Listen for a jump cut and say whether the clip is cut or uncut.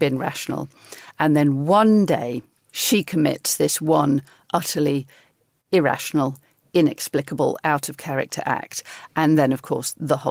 uncut